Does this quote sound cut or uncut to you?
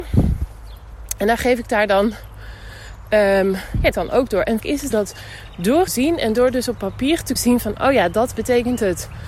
cut